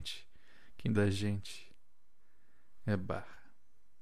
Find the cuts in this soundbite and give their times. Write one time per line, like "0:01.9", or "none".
0:00.9